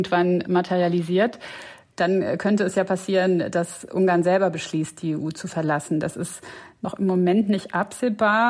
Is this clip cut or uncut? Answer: uncut